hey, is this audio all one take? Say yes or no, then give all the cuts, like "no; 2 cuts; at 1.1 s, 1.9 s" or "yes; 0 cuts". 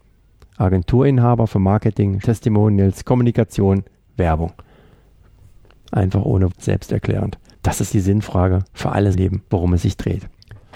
no; 4 cuts; at 2.2 s, 6.5 s, 7.9 s, 9.1 s